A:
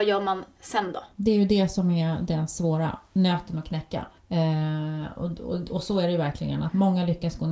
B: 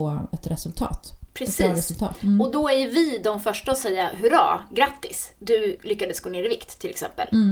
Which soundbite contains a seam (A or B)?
A